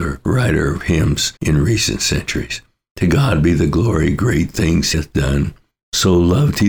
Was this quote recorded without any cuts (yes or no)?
no